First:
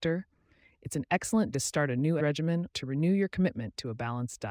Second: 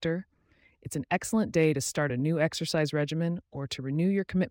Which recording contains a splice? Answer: first; 3 cuts; at 1.5 s, 2.2 s, 2.7 s

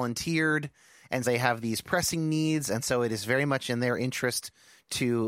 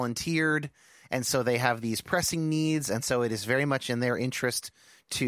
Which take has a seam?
first; 1 cut; at 1.2 s

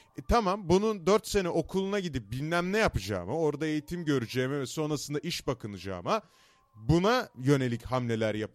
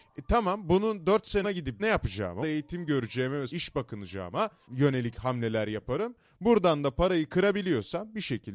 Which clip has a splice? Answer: second; 5 cuts; at 1.4 s, 1.8 s, 2.4 s, 3.5 s, 4.6 s

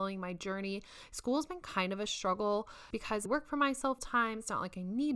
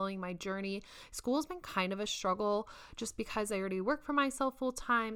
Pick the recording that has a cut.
first; 3 cuts; at 2.9 s, 3.3 s, 4.0 s

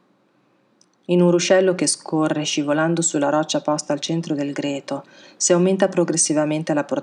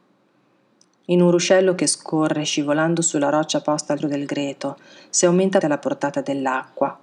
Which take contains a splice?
second; 2 cuts; at 4.0 s, 5.6 s

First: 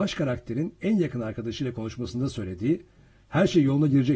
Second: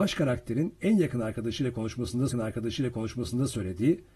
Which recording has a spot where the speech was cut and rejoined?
second; 1 cut; at 2.3 s

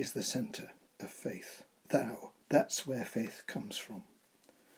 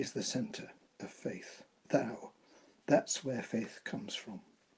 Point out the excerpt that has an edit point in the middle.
first; 1 cut; at 2.4 s

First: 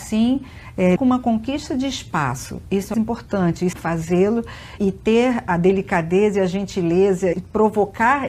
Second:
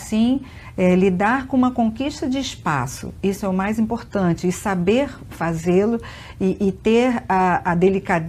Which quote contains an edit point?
first; 6 cuts; at 1.0 s, 2.9 s, 3.7 s, 4.8 s, 5.5 s, 7.3 s

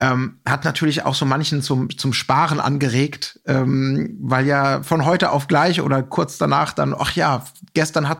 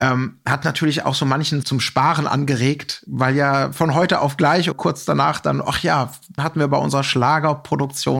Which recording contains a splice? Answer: second; 4 cuts; at 1.6 s, 3.1 s, 4.7 s, 6.4 s

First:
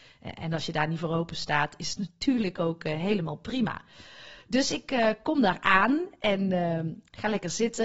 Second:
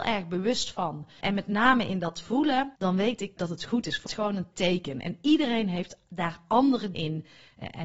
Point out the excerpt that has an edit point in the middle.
second; 6 cuts; at 1.2 s, 2.8 s, 3.4 s, 4.1 s, 4.5 s, 6.9 s

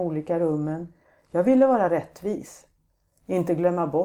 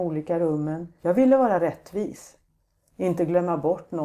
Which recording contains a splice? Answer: second; 1 cut; at 1.0 s

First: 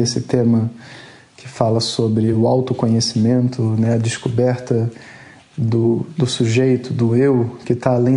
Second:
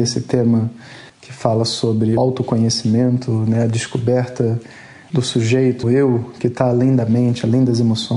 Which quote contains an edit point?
second; 4 cuts; at 1.1 s, 2.2 s, 5.1 s, 5.8 s

